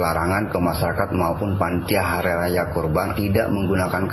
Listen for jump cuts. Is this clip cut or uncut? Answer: cut